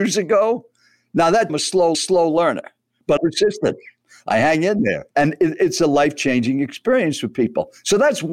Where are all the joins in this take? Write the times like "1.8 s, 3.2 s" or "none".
1.5 s, 1.9 s, 3.2 s, 5.1 s

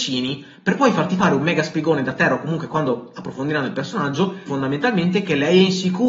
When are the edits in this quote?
4.5 s

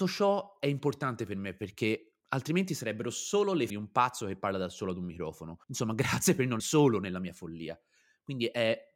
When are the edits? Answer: 2.2 s, 3.7 s, 5.6 s, 6.6 s

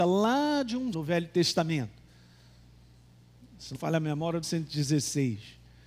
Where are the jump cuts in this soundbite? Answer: 0.9 s, 3.7 s, 4.4 s

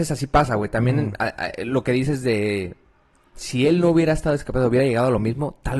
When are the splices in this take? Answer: none

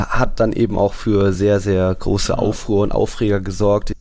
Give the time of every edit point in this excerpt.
none

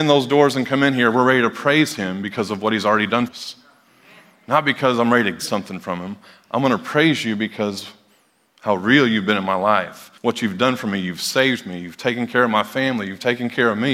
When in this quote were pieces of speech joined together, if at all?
3.3 s, 5.4 s, 10.2 s

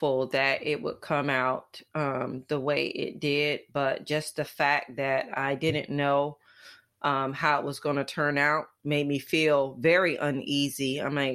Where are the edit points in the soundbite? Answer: none

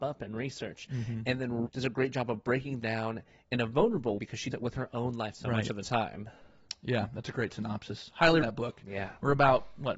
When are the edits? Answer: 1.7 s, 2.8 s, 4.2 s, 4.5 s, 5.3 s, 8.4 s

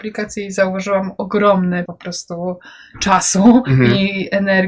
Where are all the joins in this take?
1.9 s

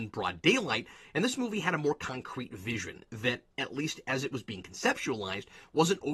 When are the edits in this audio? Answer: none

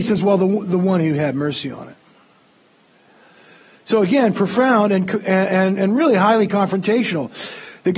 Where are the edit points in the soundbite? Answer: none

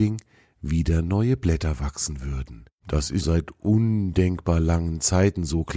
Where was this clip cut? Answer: 2.8 s, 3.2 s

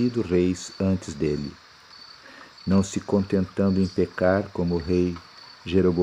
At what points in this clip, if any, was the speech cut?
none

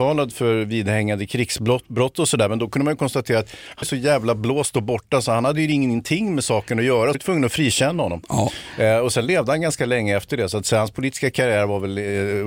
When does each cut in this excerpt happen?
3.8 s, 7.1 s

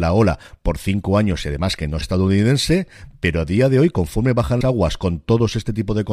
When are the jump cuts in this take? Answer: 2.0 s, 4.6 s

